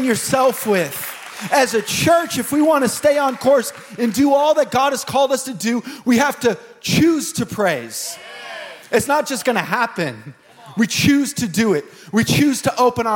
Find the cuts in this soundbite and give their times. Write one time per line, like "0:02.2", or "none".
none